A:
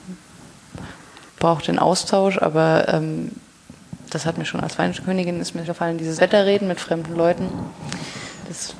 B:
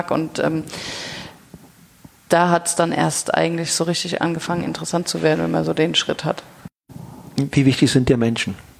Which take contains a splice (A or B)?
A